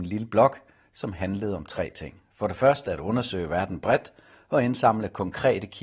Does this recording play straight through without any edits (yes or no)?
yes